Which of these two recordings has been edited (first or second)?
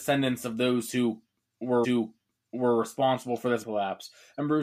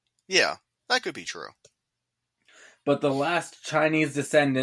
first